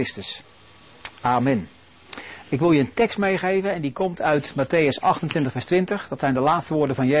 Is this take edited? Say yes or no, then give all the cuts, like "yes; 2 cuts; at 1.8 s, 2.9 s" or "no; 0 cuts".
no; 0 cuts